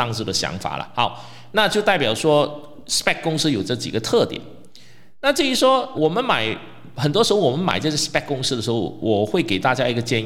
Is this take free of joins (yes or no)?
no